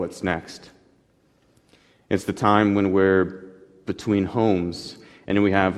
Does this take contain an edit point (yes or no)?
no